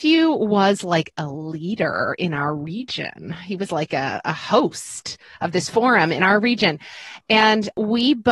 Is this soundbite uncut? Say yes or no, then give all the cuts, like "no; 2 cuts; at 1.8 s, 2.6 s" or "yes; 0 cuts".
yes; 0 cuts